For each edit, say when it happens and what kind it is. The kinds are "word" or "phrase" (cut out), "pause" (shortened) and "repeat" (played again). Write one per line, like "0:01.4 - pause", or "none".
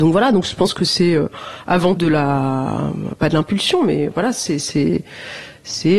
0:02.0 - word